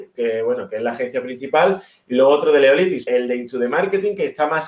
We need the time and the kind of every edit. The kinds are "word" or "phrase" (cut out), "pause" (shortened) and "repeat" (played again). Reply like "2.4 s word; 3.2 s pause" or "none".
3.1 s word